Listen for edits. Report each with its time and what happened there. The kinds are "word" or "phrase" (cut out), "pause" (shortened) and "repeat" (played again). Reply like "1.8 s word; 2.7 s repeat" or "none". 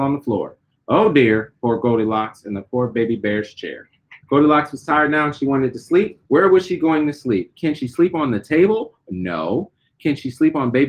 4.2 s pause; 6.3 s pause